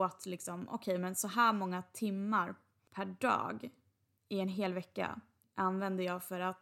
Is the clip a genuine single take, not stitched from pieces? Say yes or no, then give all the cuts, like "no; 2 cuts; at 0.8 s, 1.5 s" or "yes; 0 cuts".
yes; 0 cuts